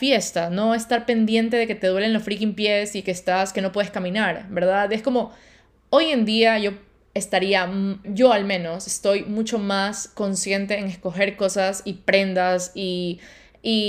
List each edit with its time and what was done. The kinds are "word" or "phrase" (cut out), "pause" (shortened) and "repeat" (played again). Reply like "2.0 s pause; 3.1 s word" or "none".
8.0 s word